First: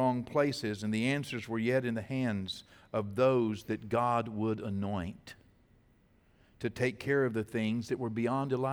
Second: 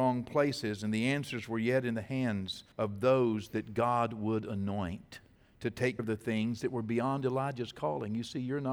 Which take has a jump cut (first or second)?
second